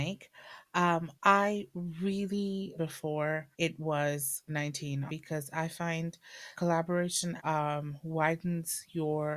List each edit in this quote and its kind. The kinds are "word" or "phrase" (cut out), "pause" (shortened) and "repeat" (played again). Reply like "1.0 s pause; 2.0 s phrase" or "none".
1.2 s pause; 2.8 s phrase; 3.5 s pause; 4.5 s word; 5.1 s word; 6.5 s word; 7.4 s word